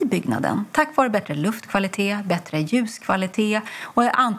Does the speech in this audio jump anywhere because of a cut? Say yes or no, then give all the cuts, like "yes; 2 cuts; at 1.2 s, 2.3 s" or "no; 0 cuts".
no; 0 cuts